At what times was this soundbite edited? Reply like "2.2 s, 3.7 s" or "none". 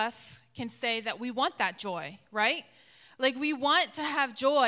none